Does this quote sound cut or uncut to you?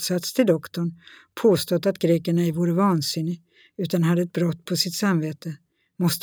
uncut